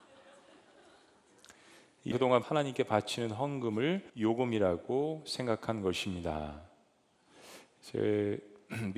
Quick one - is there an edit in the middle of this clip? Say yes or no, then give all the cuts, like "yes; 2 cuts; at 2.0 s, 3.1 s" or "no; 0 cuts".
yes; 3 cuts; at 2.1 s, 2.4 s, 4.1 s